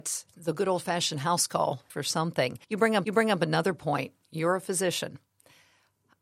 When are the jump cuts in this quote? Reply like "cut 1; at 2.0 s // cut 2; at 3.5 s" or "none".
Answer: cut 1; at 1.9 s // cut 2; at 2.6 s // cut 3; at 3.0 s // cut 4; at 4.2 s